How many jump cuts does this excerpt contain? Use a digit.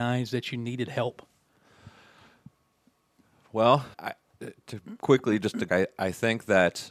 3